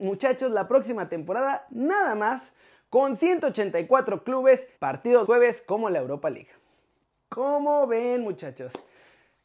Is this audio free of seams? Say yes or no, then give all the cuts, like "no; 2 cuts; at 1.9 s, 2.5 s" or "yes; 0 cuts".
no; 2 cuts; at 4.8 s, 5.2 s